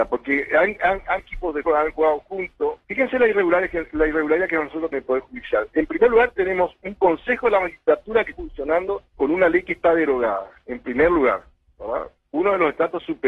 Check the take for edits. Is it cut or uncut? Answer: cut